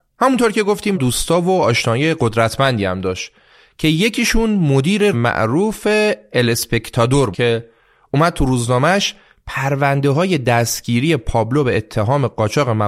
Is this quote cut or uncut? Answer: cut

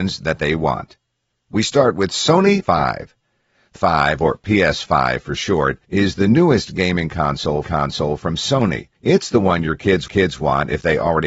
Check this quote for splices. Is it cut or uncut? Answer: cut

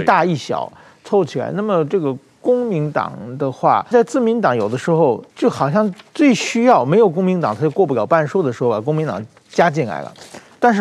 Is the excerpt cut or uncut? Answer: cut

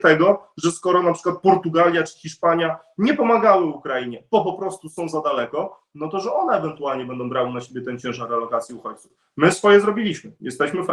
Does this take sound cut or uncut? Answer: uncut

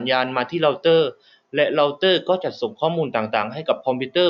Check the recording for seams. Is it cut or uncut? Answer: uncut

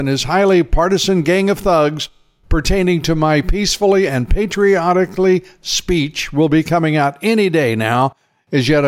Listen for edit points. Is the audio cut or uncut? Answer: uncut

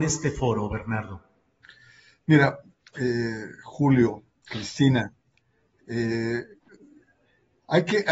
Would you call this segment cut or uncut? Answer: uncut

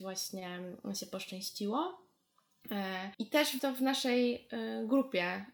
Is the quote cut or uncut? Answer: cut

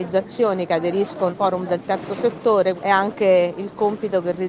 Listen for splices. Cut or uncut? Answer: cut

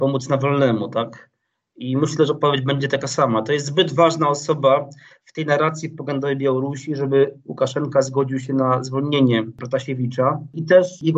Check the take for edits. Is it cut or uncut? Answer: uncut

